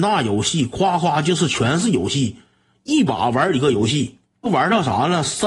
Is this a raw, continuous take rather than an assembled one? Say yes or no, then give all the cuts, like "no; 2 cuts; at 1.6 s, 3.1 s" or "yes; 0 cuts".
yes; 0 cuts